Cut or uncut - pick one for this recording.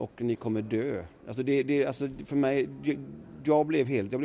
uncut